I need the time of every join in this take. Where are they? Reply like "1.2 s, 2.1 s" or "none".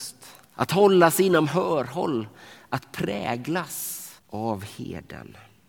4.2 s

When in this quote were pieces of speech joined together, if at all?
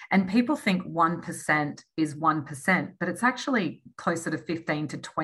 none

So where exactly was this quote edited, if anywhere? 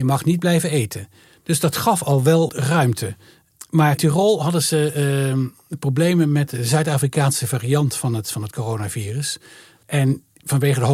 2.5 s, 4.0 s

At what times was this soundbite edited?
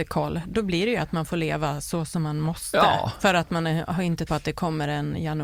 4.3 s

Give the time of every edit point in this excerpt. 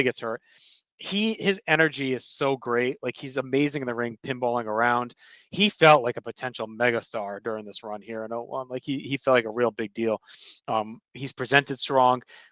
10.6 s

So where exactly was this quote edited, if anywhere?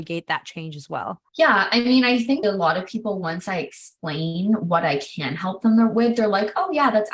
1.3 s, 2.4 s

